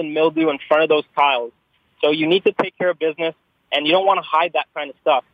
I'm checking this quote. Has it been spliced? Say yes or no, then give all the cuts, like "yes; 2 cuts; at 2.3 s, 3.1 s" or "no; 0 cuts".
no; 0 cuts